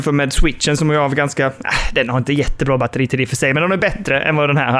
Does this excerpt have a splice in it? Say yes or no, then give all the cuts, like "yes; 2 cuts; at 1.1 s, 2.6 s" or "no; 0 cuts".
no; 0 cuts